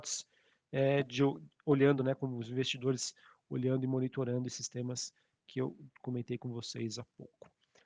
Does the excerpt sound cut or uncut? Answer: uncut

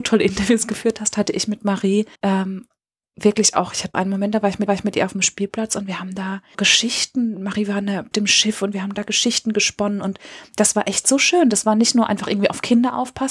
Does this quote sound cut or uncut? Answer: cut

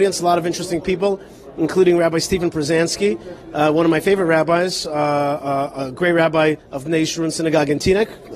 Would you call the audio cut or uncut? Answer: cut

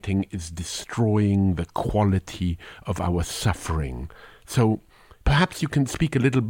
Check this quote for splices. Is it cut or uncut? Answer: uncut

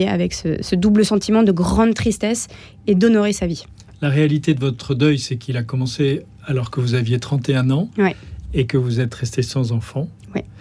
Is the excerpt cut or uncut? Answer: uncut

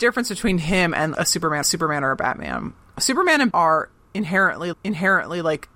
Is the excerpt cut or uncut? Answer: cut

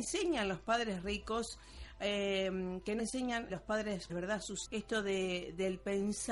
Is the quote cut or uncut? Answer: cut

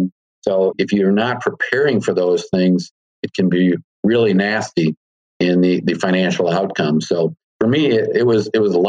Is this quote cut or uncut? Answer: uncut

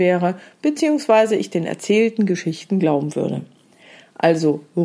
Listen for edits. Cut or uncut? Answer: uncut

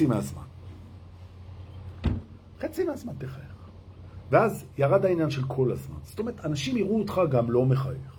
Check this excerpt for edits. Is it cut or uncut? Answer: uncut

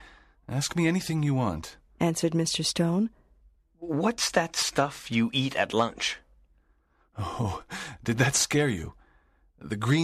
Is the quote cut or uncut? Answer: uncut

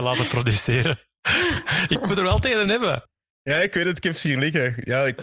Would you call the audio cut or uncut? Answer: uncut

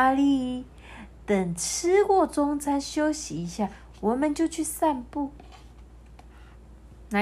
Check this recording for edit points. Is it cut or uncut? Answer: uncut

